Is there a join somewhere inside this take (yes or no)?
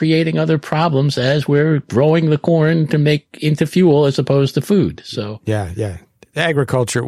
no